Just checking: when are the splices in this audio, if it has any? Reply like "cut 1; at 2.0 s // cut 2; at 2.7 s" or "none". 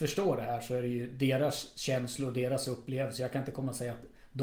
none